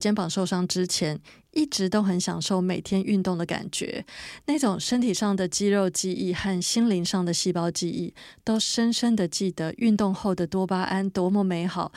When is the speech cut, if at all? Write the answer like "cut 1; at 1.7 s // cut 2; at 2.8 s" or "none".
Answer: none